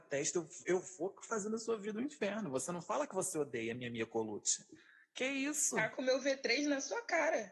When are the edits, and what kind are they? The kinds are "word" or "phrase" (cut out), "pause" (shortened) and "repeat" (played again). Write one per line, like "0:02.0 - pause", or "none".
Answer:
none

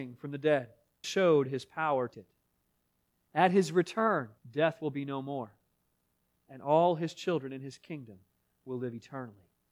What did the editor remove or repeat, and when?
0:01.0 - word
0:02.1 - word
0:04.4 - pause

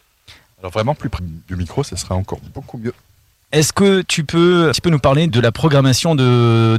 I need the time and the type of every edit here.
0:01.2 - word
0:04.7 - word
0:05.3 - word

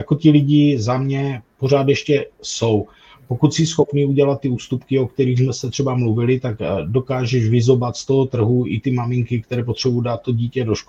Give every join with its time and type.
none

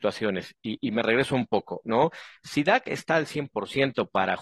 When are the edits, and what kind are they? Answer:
none

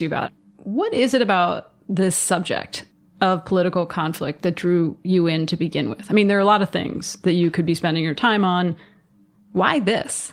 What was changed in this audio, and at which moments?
0:02.9 - pause

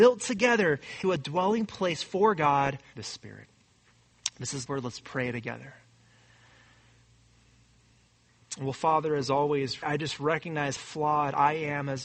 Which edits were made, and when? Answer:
0:01.0 - word
0:02.9 - word
0:04.7 - word
0:09.8 - word
0:10.8 - word

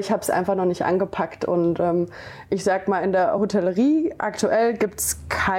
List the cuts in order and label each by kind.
none

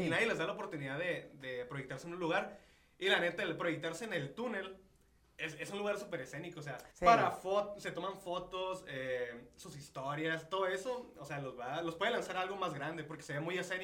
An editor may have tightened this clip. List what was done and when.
0:06.9 - pause

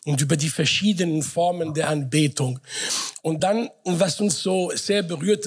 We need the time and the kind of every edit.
none

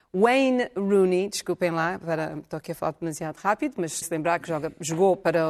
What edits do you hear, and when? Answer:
0:04.0 - word

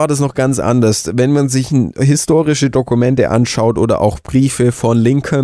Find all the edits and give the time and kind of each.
none

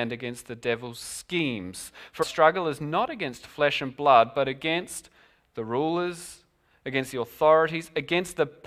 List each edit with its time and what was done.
0:02.2 - word

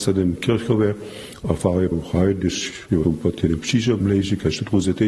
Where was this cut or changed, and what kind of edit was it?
0:01.9 - word
0:03.0 - word
0:04.0 - word

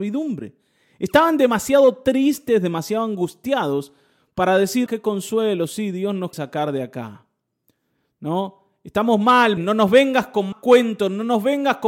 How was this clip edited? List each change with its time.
0:04.9 - word
0:06.3 - word
0:09.6 - word
0:10.5 - word

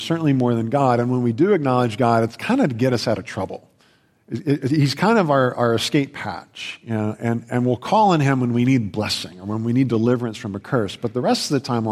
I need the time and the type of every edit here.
0:03.8 - pause

